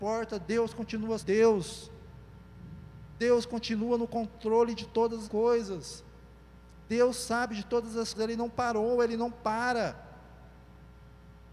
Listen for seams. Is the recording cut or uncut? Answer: cut